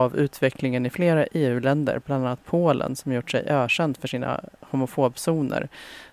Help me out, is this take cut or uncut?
uncut